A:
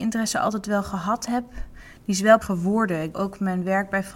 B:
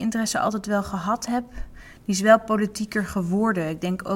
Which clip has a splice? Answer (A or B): A